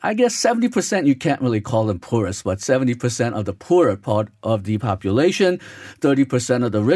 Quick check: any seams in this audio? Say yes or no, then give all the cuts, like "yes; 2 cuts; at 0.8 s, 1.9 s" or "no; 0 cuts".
no; 0 cuts